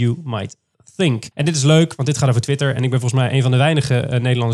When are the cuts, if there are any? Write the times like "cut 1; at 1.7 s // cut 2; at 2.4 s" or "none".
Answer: cut 1; at 1.3 s